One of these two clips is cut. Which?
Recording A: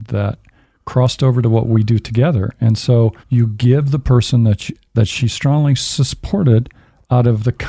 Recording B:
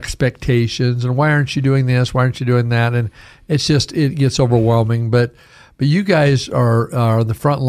A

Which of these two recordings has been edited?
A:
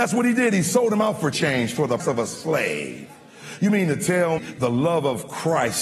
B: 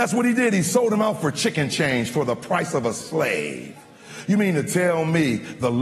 A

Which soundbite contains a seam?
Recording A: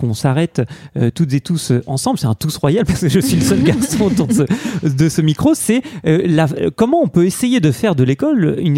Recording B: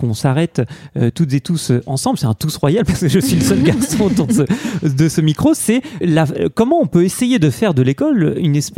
B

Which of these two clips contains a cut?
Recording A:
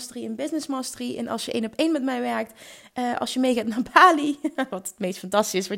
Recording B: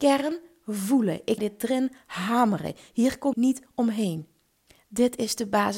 B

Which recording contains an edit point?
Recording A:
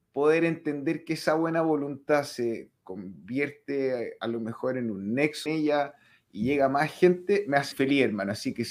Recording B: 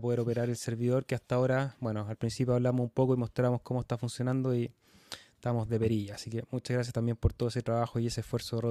A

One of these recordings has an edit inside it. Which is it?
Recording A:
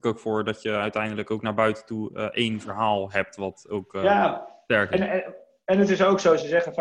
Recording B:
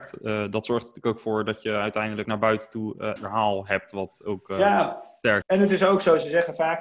B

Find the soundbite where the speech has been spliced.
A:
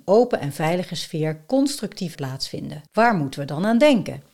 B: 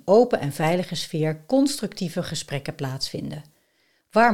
A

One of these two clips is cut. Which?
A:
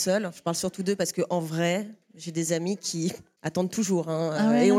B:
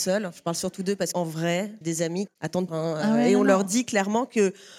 B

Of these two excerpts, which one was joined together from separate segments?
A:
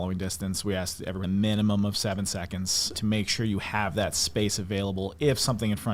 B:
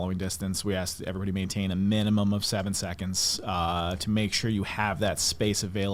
A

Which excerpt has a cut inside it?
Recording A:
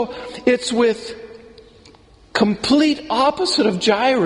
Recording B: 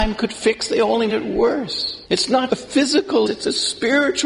B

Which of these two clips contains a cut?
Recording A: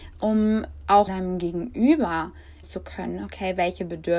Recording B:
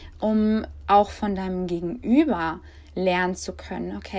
A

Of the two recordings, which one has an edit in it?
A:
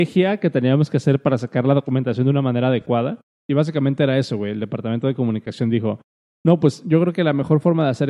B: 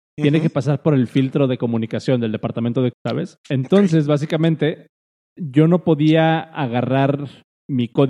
B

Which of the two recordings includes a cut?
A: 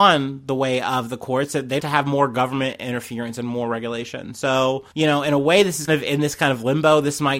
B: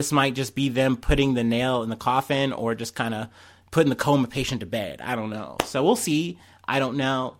A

